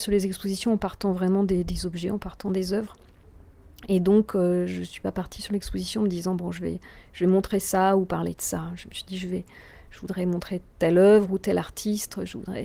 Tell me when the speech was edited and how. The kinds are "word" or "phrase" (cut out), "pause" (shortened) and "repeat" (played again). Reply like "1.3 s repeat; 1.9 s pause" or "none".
none